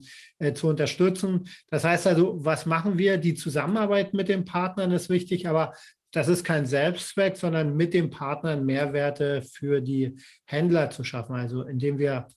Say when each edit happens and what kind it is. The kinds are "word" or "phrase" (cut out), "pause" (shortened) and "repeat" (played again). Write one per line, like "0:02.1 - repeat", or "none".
none